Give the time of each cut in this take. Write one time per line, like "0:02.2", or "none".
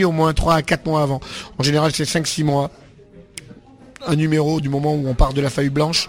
none